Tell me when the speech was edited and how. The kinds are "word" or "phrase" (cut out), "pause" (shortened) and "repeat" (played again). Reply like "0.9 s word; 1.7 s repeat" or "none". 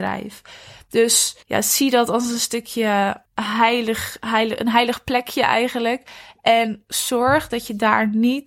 1.4 s pause; 3.3 s pause

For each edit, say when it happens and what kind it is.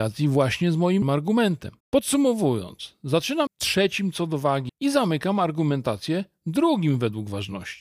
1.0 s word; 1.8 s pause; 3.5 s word; 4.7 s word

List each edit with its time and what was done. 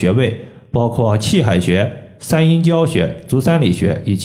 2.2 s phrase

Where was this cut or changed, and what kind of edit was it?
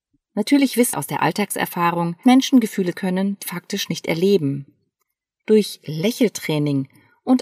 0.9 s word; 2.2 s word; 2.9 s word; 3.4 s word

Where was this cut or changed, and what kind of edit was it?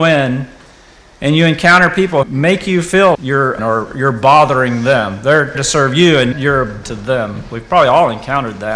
2.2 s word; 3.1 s word; 3.6 s word; 5.5 s word; 6.3 s word; 6.8 s word

